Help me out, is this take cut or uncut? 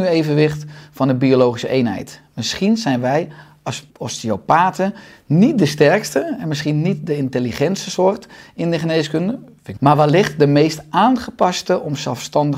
cut